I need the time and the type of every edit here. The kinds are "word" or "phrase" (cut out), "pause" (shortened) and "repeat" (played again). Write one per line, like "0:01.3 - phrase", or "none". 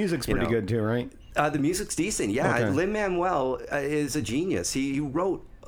none